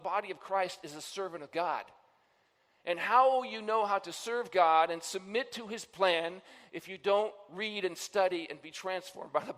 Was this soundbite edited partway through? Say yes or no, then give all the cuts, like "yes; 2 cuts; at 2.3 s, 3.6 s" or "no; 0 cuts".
no; 0 cuts